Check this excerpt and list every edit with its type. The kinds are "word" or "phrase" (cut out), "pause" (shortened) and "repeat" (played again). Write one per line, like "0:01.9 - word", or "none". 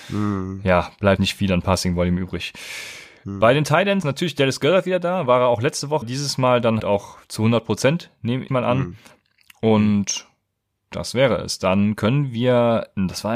0:01.2 - word
0:04.0 - word
0:06.0 - word
0:06.8 - word
0:08.5 - word